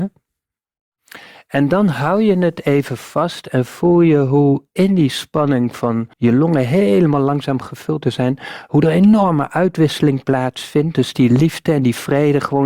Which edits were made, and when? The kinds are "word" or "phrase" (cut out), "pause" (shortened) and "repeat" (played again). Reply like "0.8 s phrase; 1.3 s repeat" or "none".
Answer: 6.1 s pause